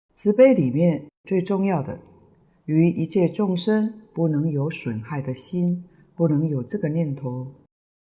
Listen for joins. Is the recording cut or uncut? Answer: uncut